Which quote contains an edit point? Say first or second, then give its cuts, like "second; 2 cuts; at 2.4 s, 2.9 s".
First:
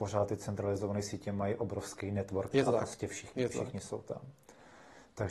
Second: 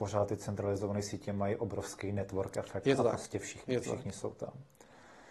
first; 1 cut; at 2.5 s